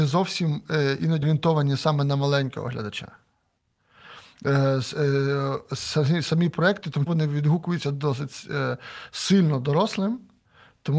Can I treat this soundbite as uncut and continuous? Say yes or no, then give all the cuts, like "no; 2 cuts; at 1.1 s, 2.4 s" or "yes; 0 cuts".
no; 2 cuts; at 1.2 s, 7.1 s